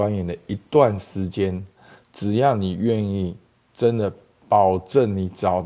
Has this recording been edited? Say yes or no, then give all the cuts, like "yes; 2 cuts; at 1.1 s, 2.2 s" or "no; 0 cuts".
no; 0 cuts